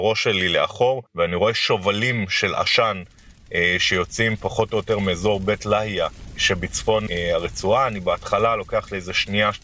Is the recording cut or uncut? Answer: cut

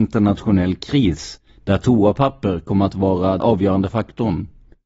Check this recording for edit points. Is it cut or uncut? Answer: cut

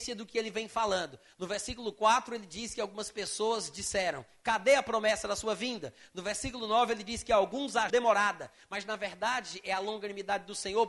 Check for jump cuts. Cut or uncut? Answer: cut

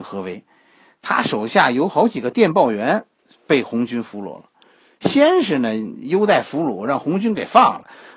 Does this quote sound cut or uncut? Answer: uncut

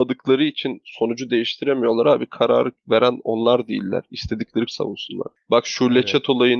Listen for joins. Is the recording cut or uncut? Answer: cut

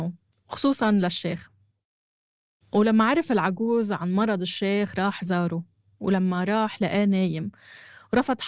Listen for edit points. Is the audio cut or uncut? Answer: uncut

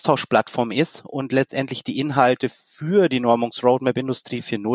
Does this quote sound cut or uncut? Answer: uncut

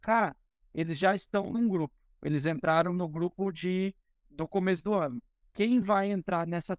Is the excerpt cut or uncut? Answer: uncut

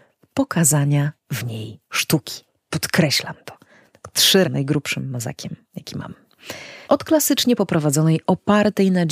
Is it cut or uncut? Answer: cut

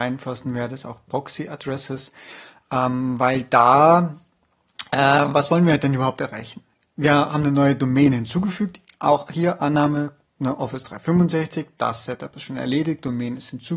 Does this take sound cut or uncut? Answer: uncut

